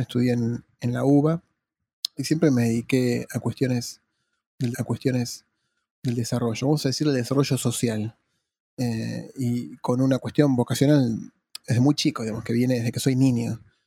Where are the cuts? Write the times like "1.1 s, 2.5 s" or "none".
4.7 s